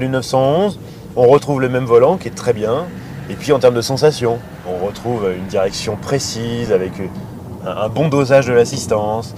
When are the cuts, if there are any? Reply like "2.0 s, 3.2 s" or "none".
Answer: none